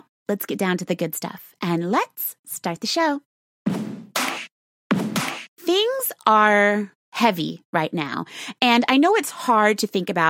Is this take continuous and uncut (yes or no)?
no